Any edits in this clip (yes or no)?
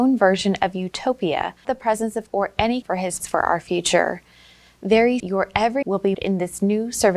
yes